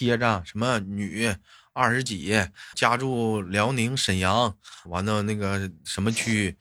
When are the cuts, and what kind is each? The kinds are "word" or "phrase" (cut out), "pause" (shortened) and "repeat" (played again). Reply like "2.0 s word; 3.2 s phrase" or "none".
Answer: 2.7 s word; 4.9 s word